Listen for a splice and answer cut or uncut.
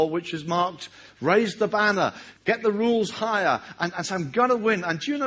cut